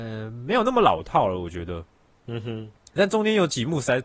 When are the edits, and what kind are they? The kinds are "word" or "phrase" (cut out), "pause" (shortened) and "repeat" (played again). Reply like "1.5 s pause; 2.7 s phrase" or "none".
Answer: 3.0 s word